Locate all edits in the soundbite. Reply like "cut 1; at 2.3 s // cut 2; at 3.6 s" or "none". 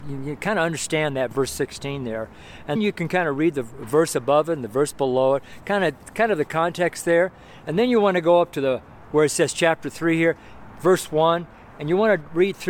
cut 1; at 2.7 s